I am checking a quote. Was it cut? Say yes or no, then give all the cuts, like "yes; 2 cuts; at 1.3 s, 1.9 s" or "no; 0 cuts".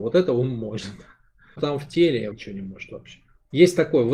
yes; 2 cuts; at 1.6 s, 2.3 s